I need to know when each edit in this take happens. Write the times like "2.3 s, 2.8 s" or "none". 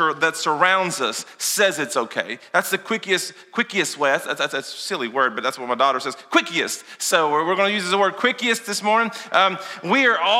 none